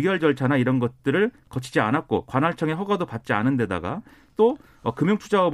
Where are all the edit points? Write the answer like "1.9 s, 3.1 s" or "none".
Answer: none